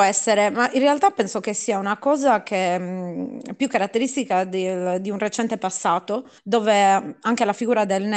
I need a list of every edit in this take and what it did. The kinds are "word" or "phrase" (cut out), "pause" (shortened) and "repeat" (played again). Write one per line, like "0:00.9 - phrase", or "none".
0:06.4 - pause